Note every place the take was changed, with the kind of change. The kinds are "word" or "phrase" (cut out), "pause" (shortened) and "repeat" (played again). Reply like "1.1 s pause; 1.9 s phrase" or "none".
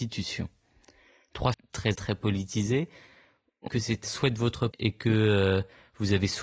1.5 s word; 1.9 s word; 3.7 s word; 4.0 s word; 4.7 s word